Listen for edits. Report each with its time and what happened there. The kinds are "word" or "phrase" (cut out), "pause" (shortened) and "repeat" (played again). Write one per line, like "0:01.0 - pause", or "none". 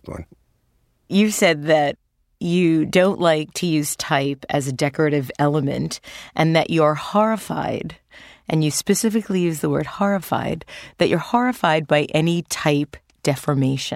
none